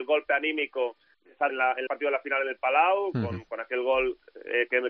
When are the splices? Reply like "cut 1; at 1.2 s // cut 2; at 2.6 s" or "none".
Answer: cut 1; at 1.1 s // cut 2; at 1.5 s // cut 3; at 1.9 s